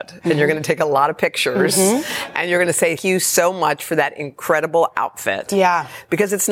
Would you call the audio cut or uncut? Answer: cut